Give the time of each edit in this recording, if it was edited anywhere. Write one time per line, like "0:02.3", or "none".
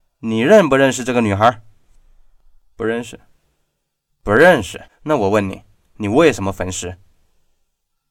0:04.9